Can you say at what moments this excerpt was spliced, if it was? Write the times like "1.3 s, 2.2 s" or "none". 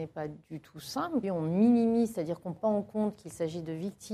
1.2 s, 2.6 s